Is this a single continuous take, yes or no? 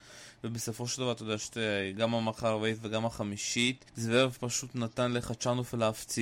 no